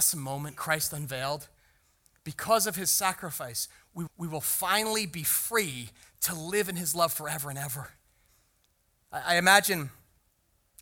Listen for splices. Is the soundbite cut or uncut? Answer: cut